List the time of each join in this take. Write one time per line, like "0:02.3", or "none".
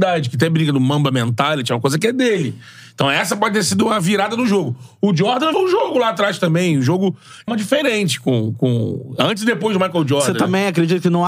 0:05.5
0:07.5